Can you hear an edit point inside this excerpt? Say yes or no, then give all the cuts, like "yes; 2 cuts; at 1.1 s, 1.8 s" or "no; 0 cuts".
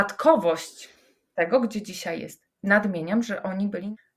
no; 0 cuts